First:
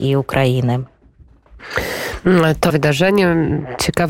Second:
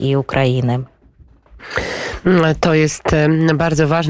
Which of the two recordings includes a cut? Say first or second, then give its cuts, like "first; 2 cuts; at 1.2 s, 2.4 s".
first; 1 cut; at 2.7 s